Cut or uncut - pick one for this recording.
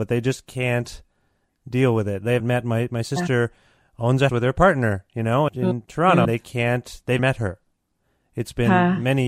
cut